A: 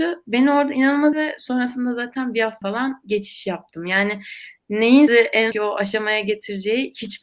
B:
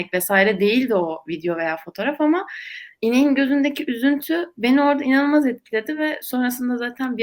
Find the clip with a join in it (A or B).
A